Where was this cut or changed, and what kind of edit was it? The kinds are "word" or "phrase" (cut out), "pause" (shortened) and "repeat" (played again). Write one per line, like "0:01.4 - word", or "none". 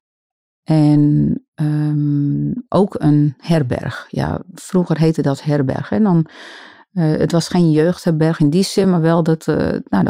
none